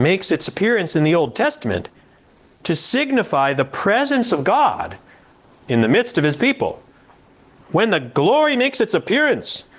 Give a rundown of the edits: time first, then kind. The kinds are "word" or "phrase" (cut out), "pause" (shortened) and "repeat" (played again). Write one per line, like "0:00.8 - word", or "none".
none